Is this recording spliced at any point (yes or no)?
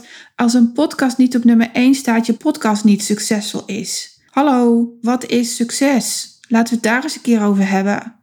yes